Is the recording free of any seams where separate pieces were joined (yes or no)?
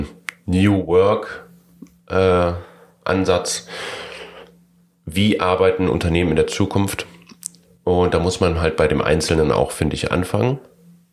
yes